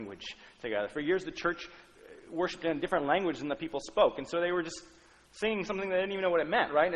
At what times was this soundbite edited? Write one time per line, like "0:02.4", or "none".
none